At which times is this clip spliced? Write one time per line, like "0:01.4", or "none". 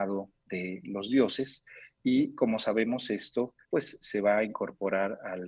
0:03.6